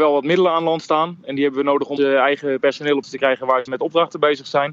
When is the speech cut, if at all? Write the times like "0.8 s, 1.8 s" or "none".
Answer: 2.0 s, 3.0 s, 3.7 s